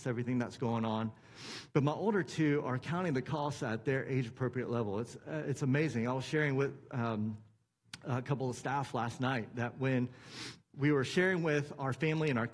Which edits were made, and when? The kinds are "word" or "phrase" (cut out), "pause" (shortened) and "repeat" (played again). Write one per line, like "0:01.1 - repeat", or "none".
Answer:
none